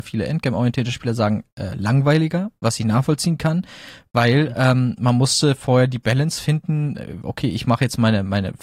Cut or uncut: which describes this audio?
uncut